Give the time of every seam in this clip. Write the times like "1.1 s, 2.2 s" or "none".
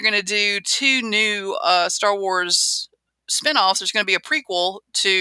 none